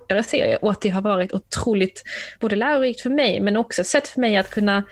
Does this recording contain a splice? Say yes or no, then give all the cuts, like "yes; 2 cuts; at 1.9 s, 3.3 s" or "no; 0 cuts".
no; 0 cuts